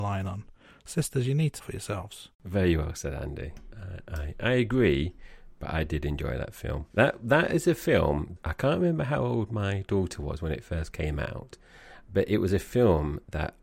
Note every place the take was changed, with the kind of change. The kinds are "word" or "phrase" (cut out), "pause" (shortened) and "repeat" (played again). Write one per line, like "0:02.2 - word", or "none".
0:01.6 - phrase
0:02.3 - pause
0:06.9 - pause
0:08.4 - word